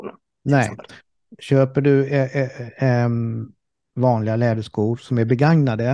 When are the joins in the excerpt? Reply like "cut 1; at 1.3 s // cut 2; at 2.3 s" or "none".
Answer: none